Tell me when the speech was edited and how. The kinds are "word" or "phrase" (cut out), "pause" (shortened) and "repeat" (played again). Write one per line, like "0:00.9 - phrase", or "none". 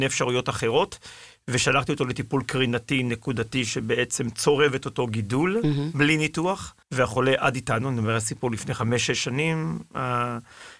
0:06.8 - pause